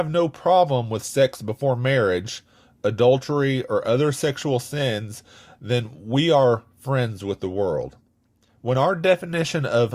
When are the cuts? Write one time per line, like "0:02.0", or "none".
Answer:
none